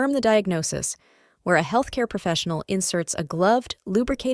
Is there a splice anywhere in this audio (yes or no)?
no